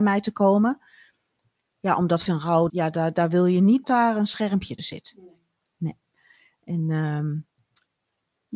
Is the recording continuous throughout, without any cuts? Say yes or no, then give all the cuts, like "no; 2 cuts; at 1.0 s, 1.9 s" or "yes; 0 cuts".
no; 4 cuts; at 2.3 s, 2.7 s, 3.8 s, 4.8 s